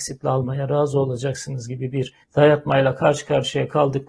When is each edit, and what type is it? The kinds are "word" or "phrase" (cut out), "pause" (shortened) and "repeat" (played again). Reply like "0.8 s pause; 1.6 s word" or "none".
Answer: 2.2 s pause